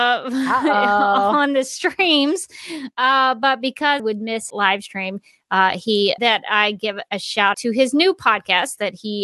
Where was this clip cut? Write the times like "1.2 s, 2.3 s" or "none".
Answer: 4.0 s, 4.5 s, 6.2 s, 7.1 s, 7.5 s